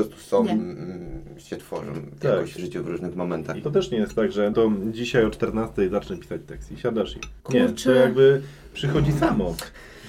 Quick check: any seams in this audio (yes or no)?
yes